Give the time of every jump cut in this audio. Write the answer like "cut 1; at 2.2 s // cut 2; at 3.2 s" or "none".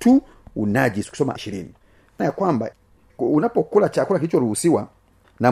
cut 1; at 1.4 s // cut 2; at 2.2 s // cut 3; at 3.1 s